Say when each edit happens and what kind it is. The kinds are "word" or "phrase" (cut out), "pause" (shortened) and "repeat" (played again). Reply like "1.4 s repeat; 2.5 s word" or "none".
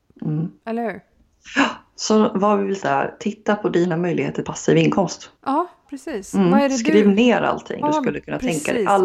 2.8 s phrase; 4.4 s word; 5.4 s pause; 7.8 s word